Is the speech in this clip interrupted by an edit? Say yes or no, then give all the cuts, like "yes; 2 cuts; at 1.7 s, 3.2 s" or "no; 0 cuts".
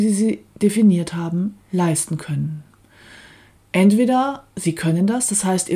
no; 0 cuts